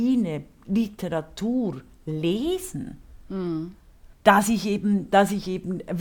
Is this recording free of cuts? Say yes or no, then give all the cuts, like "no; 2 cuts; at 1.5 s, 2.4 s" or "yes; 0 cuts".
no; 1 cut; at 4.1 s